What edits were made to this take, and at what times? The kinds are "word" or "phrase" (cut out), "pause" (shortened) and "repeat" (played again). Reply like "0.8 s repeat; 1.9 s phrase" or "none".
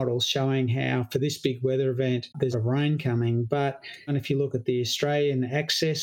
2.5 s phrase; 4.1 s word